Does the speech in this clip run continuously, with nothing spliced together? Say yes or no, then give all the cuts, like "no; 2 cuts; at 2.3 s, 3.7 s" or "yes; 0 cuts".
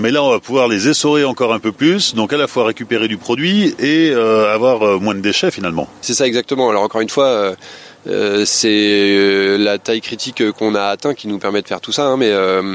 yes; 0 cuts